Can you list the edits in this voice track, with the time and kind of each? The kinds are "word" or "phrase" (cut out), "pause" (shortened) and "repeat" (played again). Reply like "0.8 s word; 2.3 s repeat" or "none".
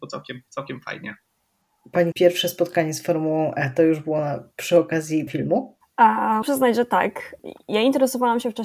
2.1 s word; 5.3 s word; 6.4 s word

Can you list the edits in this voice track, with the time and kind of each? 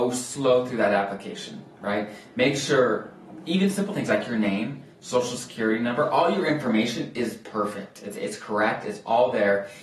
1.7 s pause

